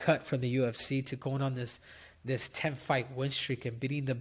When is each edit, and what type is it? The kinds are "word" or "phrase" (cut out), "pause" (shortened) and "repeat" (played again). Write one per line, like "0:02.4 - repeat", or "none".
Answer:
none